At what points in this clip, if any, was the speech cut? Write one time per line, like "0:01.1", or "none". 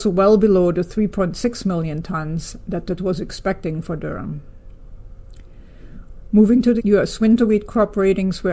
0:03.0
0:06.8